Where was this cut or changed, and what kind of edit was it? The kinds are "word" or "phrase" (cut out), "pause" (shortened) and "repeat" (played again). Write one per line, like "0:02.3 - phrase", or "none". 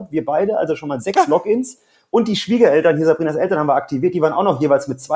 none